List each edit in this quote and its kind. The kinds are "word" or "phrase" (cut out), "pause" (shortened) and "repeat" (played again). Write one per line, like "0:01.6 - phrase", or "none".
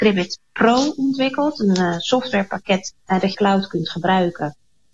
0:03.0 - pause
0:03.3 - phrase

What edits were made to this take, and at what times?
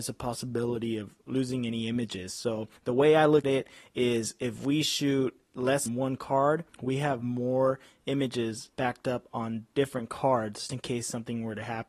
0:02.8 - pause
0:03.4 - word
0:05.9 - phrase
0:06.7 - pause
0:08.7 - pause
0:10.7 - word

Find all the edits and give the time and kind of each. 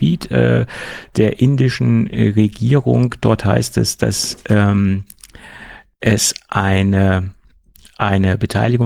none

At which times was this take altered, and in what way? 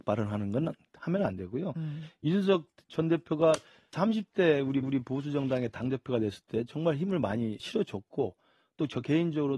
0:03.9 - word
0:04.8 - repeat
0:07.6 - word

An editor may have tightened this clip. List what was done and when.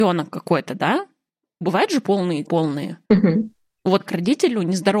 0:01.6 - phrase
0:02.4 - phrase
0:03.0 - pause
0:04.1 - word

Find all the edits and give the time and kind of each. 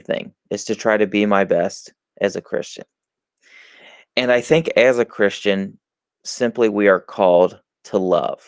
0:06.1 - pause

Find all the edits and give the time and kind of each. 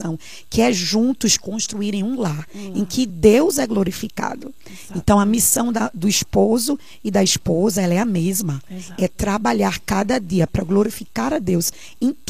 none

